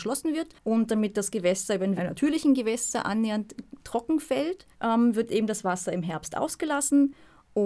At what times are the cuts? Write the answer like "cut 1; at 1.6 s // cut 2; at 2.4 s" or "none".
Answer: cut 1; at 2.0 s // cut 2; at 4.7 s